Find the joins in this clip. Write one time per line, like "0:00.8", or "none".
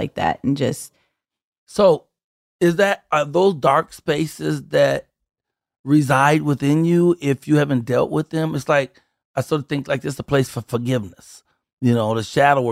none